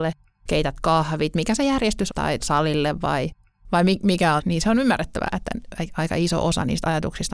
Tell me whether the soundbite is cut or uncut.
cut